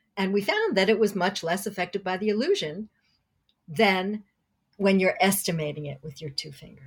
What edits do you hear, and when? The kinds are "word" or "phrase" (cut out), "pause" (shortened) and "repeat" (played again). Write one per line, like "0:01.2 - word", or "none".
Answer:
none